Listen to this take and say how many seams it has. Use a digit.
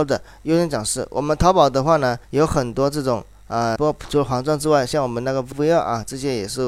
3